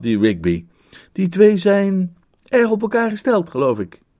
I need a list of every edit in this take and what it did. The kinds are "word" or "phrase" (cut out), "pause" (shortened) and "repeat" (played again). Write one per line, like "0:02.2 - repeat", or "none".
none